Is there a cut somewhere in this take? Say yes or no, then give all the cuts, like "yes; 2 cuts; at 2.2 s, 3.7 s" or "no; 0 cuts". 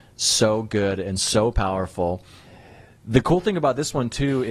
no; 0 cuts